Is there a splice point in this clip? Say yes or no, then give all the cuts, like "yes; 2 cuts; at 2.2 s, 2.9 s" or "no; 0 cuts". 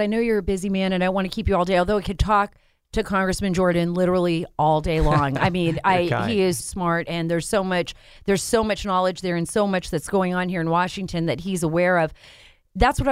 yes; 1 cut; at 6.6 s